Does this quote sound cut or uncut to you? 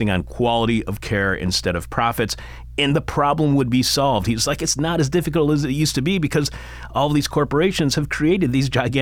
uncut